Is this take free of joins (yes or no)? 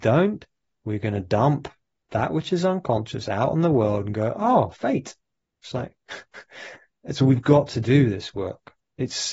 yes